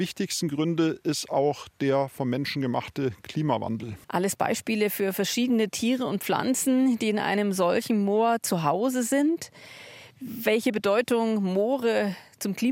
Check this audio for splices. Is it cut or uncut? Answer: cut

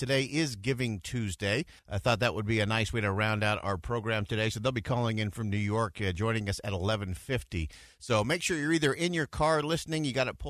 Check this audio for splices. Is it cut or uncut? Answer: cut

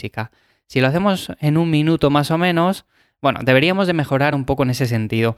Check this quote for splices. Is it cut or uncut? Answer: uncut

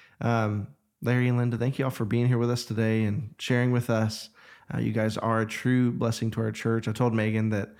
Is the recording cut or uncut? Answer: uncut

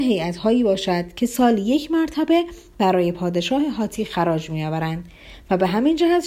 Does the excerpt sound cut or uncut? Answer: uncut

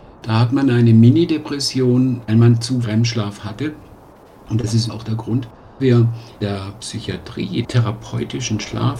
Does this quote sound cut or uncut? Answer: cut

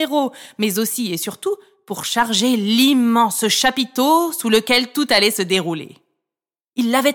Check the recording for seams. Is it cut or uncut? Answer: uncut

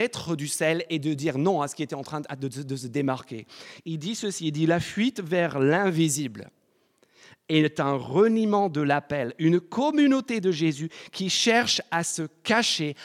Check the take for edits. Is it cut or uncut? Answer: uncut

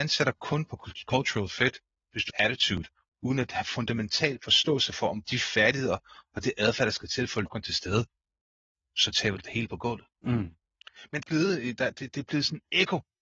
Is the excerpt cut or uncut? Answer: cut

